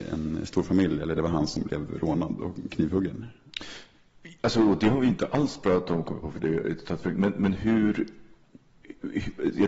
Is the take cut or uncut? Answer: uncut